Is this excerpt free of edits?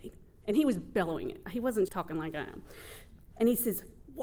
no; 1 cut; at 1.9 s

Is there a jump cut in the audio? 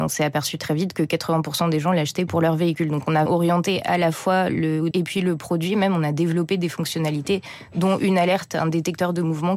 yes; 3 cuts; at 2.3 s, 3.3 s, 4.9 s

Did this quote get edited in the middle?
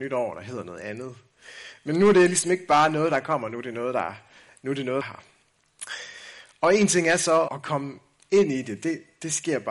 yes; 2 cuts; at 5.0 s, 7.5 s

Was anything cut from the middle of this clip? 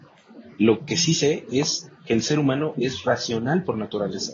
no; 0 cuts

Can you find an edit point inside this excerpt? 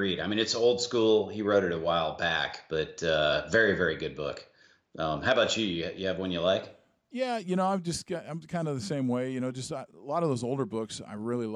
no; 0 cuts

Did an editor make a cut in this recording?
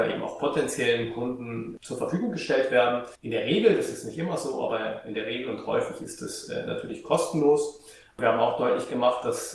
yes; 1 cut; at 3.1 s

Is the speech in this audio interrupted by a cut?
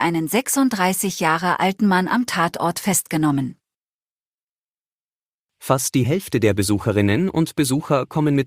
no; 0 cuts

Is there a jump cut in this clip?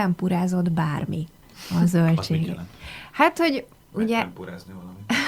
no; 0 cuts

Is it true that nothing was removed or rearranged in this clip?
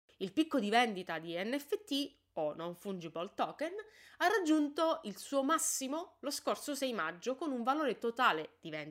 yes; 0 cuts

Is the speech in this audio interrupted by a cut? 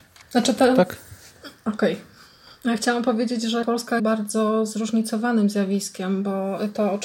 yes; 2 cuts; at 3.6 s, 4.0 s

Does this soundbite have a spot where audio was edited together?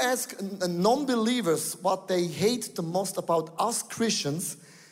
no; 0 cuts

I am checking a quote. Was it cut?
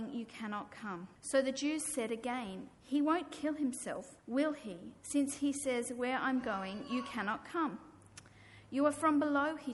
yes; 3 cuts; at 1.2 s, 2.7 s, 4.2 s

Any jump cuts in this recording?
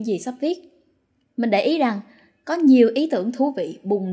no; 0 cuts

